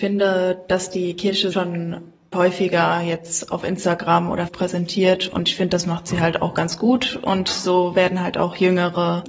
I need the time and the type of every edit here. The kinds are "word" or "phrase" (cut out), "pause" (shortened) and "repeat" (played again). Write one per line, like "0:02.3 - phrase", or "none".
0:01.5 - word
0:02.3 - word
0:04.5 - word